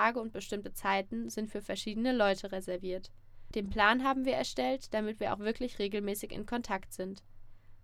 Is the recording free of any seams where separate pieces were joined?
yes; 0 cuts

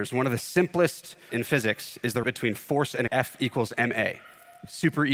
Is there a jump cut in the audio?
yes; 3 cuts; at 1.3 s, 2.2 s, 3.1 s

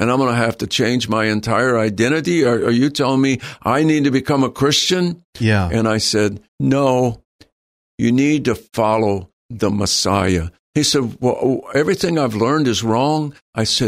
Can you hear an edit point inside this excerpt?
yes; 1 cut; at 6.5 s

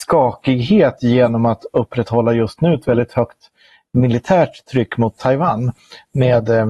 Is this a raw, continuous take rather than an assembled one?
yes; 0 cuts

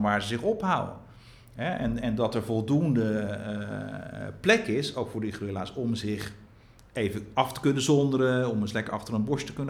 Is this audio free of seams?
yes; 0 cuts

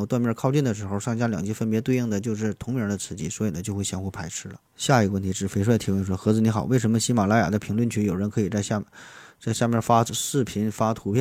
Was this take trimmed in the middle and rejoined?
yes; 1 cut; at 4.7 s

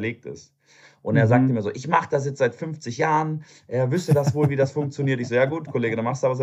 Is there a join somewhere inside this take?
no; 0 cuts

